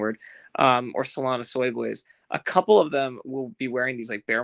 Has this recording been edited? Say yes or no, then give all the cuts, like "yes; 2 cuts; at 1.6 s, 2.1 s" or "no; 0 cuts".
no; 0 cuts